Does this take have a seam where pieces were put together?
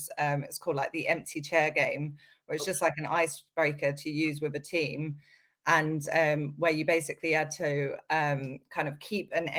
no; 0 cuts

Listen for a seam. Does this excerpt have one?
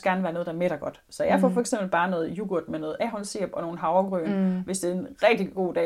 no; 0 cuts

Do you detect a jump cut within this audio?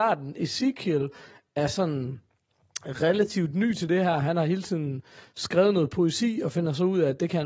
no; 0 cuts

